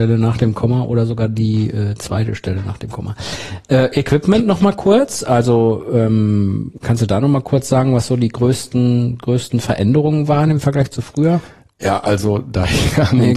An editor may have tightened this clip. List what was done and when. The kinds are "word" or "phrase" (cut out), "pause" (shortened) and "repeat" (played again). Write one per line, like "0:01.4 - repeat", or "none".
none